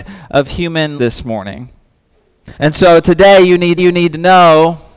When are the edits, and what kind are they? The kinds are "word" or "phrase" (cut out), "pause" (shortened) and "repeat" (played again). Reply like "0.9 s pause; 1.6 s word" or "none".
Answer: 1.0 s word; 2.5 s pause; 3.8 s repeat